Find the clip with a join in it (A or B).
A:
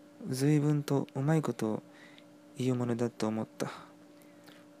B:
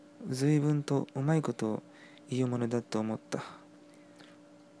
B